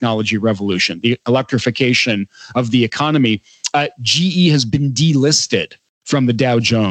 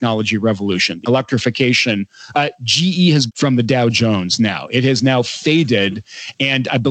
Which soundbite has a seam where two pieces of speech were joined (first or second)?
second